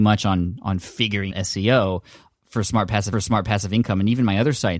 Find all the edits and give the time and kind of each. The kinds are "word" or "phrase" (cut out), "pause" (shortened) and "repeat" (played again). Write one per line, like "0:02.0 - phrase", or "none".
0:01.3 - word
0:03.1 - repeat